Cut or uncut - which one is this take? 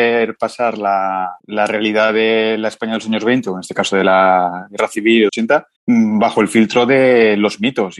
cut